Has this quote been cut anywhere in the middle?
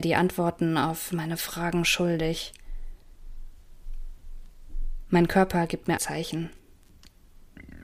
yes; 1 cut; at 6.0 s

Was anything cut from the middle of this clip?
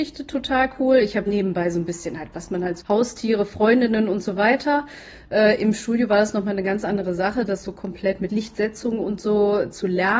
yes; 3 cuts; at 1.3 s, 2.8 s, 8.3 s

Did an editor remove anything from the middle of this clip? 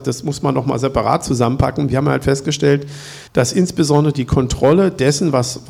yes; 1 cut; at 3.3 s

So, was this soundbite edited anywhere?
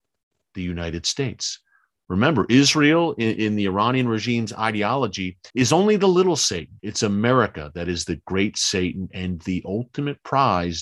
yes; 2 cuts; at 5.5 s, 6.8 s

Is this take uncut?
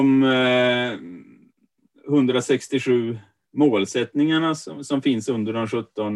yes; 0 cuts

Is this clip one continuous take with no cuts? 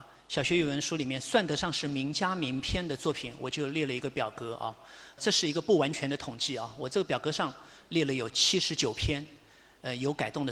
yes; 0 cuts

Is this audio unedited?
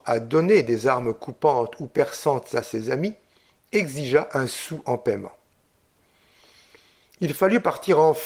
yes; 0 cuts

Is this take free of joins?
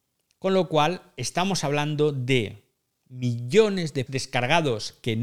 no; 1 cut; at 4.1 s

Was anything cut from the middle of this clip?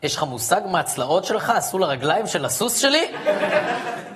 no; 0 cuts

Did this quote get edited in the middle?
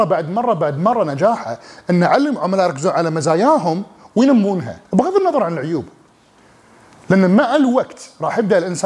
yes; 1 cut; at 4.8 s

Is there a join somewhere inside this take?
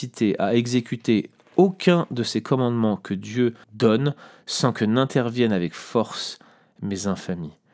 yes; 1 cut; at 3.6 s

